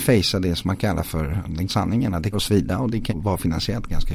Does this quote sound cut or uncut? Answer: cut